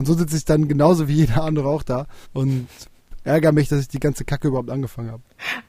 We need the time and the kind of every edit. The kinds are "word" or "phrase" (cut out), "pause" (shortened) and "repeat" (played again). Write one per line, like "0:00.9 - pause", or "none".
0:02.2 - pause